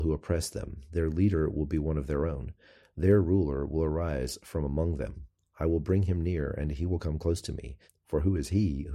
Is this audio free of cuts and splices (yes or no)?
yes